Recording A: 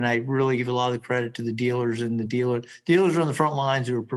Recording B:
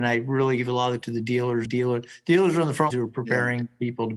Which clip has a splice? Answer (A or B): B